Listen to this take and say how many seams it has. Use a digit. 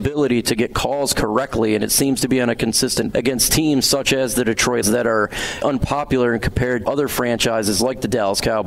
4